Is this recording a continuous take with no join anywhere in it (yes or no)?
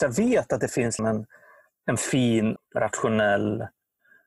no